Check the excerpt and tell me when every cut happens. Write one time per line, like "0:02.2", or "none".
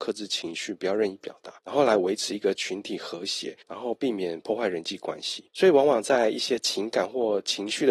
0:01.6
0:03.6
0:05.5